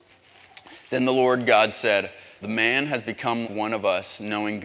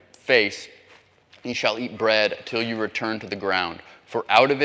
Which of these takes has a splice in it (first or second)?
first